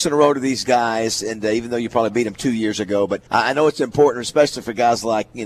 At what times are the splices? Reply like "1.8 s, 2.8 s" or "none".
3.3 s